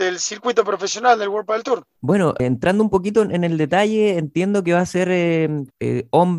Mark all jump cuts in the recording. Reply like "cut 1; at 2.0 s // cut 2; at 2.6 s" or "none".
cut 1; at 2.0 s